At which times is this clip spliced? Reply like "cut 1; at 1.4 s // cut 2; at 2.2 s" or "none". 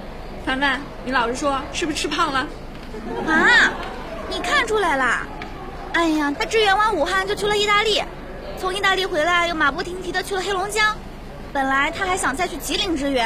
cut 1; at 6.3 s